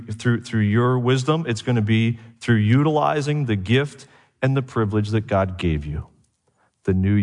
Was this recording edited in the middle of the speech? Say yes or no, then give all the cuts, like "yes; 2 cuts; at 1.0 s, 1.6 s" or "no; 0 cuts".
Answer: no; 0 cuts